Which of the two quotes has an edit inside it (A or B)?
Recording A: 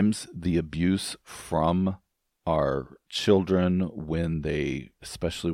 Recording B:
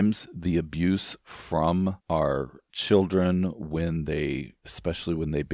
B